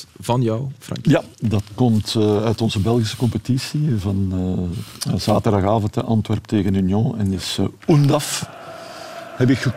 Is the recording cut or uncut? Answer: cut